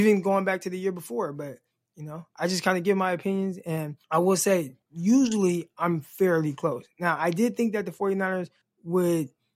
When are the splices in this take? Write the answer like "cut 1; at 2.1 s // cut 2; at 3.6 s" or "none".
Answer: cut 1; at 1.7 s // cut 2; at 4.0 s // cut 3; at 4.8 s // cut 4; at 8.6 s